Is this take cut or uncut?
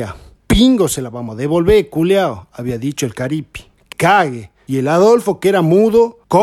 cut